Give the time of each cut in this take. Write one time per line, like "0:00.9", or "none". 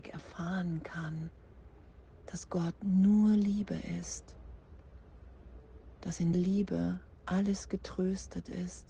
0:06.3